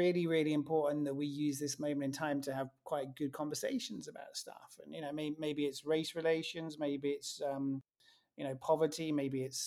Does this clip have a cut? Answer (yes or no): no